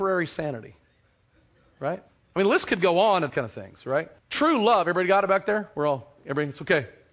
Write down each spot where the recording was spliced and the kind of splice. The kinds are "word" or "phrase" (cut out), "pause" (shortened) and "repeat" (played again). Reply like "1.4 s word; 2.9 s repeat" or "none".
2.1 s pause; 3.3 s word; 4.2 s pause